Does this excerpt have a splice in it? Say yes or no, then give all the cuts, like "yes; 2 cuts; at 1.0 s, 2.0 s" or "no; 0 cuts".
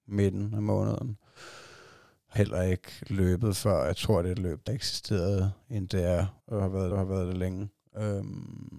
yes; 5 cuts; at 2.4 s, 4.7 s, 5.9 s, 6.4 s, 6.9 s